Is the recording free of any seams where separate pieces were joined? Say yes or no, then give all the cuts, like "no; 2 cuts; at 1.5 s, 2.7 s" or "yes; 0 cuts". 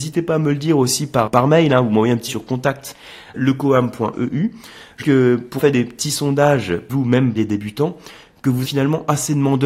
no; 8 cuts; at 1.3 s, 2.3 s, 3.3 s, 5.0 s, 5.6 s, 6.9 s, 7.4 s, 8.6 s